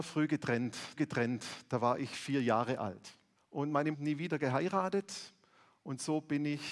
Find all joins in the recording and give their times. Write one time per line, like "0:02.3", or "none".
0:01.0
0:03.4
0:03.9